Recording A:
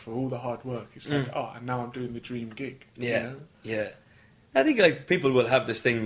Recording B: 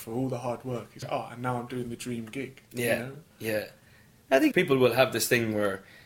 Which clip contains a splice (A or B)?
B